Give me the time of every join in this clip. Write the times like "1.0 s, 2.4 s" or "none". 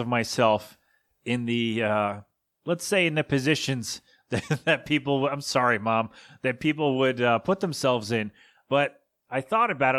none